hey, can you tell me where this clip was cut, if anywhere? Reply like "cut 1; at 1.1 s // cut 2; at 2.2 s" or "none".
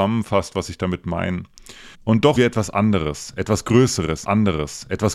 cut 1; at 1.9 s // cut 2; at 2.4 s // cut 3; at 4.2 s